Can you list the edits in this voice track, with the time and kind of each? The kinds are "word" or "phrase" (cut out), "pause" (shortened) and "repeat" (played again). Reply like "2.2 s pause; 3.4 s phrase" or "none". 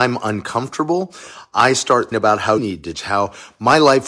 2.1 s word; 2.6 s word; 2.9 s word